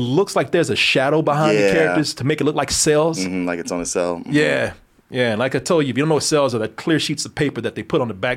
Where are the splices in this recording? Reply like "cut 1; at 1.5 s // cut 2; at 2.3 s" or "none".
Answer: none